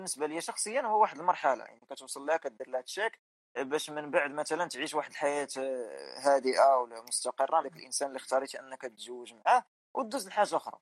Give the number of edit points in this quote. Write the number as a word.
one